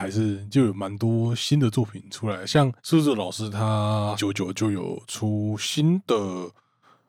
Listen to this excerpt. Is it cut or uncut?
cut